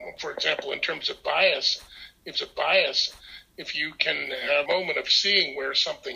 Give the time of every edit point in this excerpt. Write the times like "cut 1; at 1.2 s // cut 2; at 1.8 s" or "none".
cut 1; at 2.3 s // cut 2; at 4.7 s